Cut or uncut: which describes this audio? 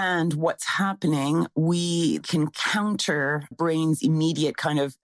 cut